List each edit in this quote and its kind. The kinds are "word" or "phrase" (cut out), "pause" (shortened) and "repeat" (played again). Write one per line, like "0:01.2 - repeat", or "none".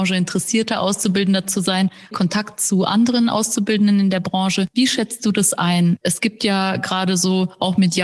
0:02.1 - phrase